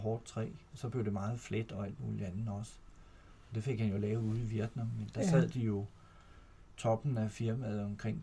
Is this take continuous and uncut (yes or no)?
yes